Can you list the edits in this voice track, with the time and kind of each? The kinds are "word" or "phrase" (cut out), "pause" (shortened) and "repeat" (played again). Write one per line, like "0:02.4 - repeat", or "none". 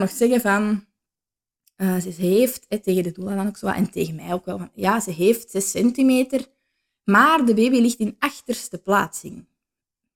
none

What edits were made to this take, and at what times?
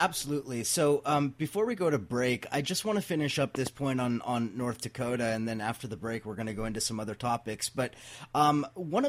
none

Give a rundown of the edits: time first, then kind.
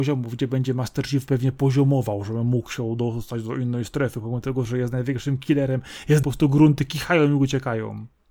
0:06.2 - phrase

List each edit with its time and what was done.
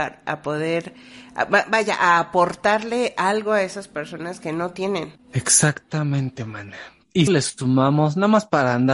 0:05.2 - pause
0:07.3 - phrase

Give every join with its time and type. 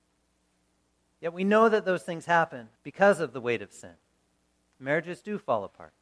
0:02.8 - pause

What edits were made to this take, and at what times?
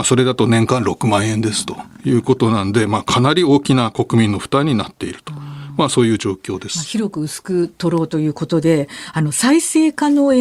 none

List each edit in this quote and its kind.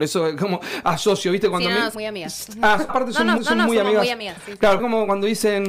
0:01.9 - word
0:02.9 - word
0:03.4 - repeat
0:04.8 - word

